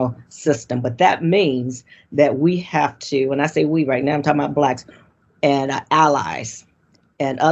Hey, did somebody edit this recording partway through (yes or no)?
no